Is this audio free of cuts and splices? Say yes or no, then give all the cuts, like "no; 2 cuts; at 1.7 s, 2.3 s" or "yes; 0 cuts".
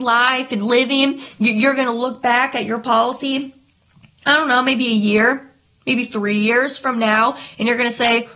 yes; 0 cuts